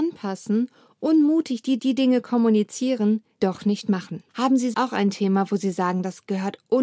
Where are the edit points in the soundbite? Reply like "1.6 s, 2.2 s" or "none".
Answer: 1.8 s, 3.4 s, 4.3 s, 4.7 s